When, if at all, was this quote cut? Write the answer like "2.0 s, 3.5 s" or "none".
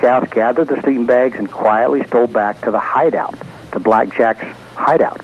none